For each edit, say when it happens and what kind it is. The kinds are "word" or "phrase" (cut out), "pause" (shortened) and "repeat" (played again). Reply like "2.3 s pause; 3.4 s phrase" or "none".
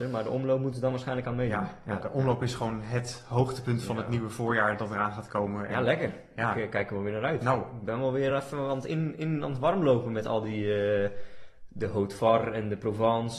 none